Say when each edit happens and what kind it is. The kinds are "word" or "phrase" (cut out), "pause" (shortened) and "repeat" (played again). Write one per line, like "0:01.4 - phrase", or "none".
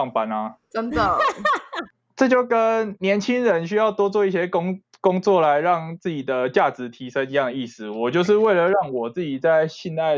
none